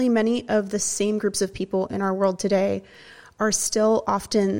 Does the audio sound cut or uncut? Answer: uncut